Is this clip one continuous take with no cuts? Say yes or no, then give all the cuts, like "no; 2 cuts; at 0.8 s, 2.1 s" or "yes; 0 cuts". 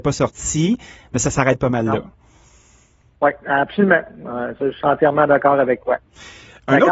yes; 0 cuts